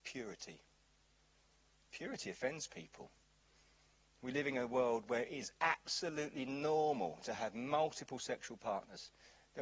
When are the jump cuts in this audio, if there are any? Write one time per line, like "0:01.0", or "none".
none